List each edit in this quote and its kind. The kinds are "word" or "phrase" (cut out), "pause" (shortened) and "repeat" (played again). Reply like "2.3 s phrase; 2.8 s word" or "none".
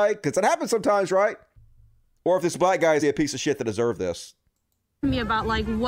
1.5 s pause; 3.0 s word

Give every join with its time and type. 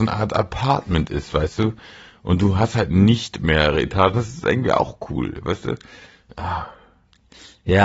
none

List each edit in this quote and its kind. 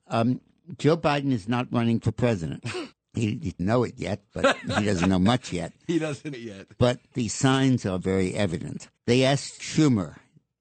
2.9 s pause; 3.6 s word; 6.3 s word; 7.1 s word; 8.0 s word; 9.0 s pause; 9.6 s word

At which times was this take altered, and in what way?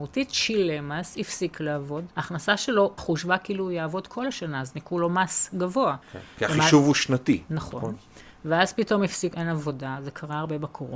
2.1 s pause; 3.0 s word; 6.0 s pause; 9.3 s word

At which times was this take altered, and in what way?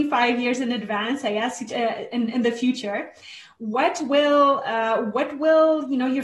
2.1 s word

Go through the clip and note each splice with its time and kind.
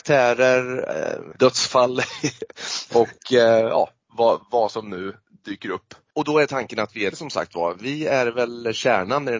1.3 s word; 4.4 s word; 7.1 s phrase

